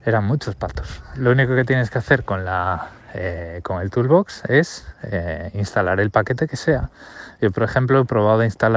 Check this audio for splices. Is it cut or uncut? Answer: uncut